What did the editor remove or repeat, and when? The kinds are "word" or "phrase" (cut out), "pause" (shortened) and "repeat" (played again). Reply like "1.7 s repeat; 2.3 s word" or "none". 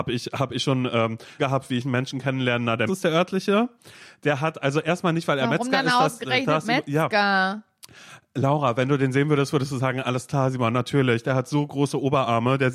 1.4 s phrase; 2.9 s phrase